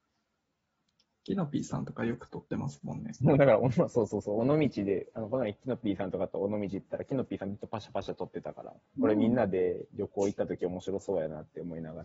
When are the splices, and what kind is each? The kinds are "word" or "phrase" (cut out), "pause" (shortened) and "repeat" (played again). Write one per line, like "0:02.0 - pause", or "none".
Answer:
0:09.0 - phrase